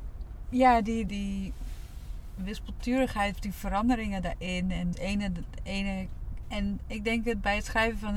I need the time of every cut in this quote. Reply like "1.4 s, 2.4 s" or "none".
1.1 s, 3.3 s, 4.9 s, 6.4 s